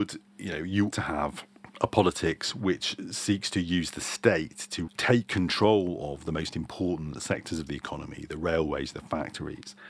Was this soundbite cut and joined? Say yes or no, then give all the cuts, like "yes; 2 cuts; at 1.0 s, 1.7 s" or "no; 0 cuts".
yes; 2 cuts; at 0.9 s, 4.9 s